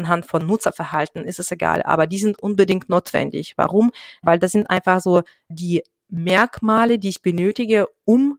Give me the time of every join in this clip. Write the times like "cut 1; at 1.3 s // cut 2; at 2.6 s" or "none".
none